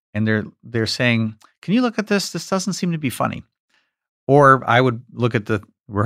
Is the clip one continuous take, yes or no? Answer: yes